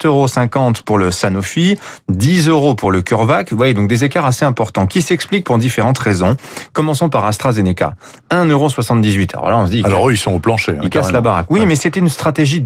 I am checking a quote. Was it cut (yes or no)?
no